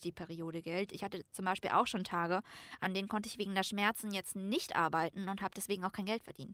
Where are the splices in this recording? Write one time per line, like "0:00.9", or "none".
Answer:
none